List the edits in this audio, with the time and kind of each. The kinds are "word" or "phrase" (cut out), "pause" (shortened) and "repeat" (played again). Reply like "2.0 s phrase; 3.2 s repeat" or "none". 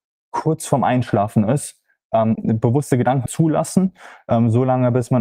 2.3 s word; 3.3 s word